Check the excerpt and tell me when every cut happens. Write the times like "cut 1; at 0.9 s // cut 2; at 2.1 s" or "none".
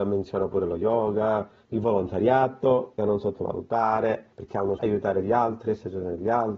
cut 1; at 3.0 s // cut 2; at 4.3 s // cut 3; at 4.8 s